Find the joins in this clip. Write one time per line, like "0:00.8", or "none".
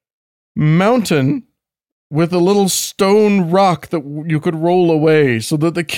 none